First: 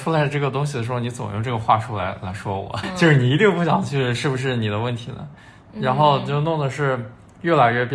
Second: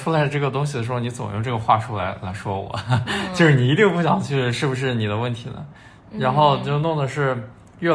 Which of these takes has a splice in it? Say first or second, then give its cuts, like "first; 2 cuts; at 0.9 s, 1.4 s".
first; 1 cut; at 2.8 s